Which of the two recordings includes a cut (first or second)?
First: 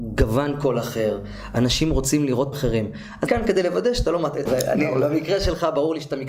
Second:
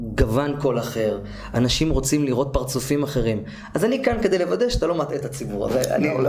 first